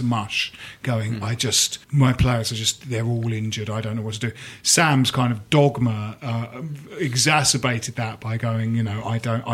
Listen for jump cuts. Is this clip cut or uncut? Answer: cut